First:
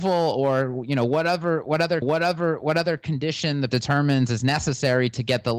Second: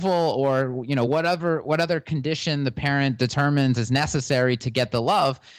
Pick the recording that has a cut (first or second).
first